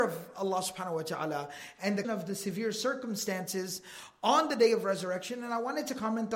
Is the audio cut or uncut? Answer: cut